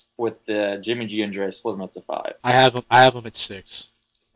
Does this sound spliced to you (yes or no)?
yes